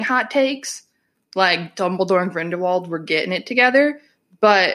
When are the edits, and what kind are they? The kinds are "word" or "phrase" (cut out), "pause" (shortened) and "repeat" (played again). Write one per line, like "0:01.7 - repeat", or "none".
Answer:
none